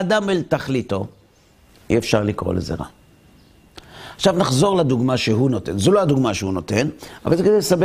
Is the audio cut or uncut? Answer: uncut